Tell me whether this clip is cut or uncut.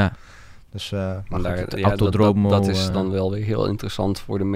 uncut